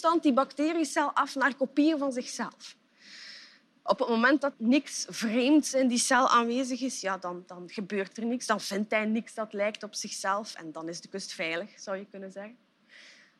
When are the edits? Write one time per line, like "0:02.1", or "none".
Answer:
0:04.5